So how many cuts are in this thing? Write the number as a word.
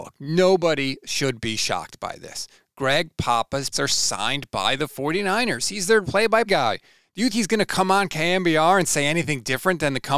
four